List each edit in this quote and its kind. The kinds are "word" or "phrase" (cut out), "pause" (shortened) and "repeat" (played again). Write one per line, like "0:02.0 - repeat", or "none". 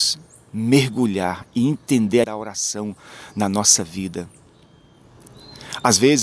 0:02.2 - word